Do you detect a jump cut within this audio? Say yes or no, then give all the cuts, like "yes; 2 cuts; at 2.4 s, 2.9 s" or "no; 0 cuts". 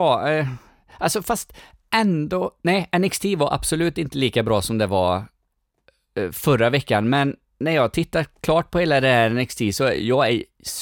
no; 0 cuts